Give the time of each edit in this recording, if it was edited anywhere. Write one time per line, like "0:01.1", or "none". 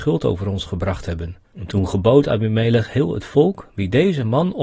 0:01.4